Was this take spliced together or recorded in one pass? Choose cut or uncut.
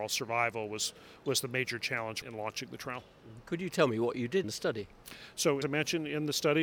cut